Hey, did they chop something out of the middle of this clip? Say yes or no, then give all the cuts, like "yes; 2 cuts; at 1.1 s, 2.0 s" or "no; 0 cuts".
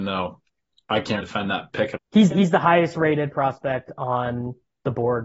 yes; 3 cuts; at 1.2 s, 2.0 s, 2.3 s